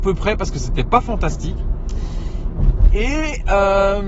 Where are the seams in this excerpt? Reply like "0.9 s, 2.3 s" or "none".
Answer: none